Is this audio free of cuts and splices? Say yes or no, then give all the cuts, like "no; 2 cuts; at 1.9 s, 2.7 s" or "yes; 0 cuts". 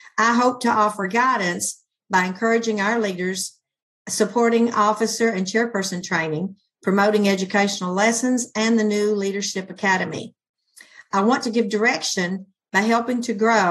yes; 0 cuts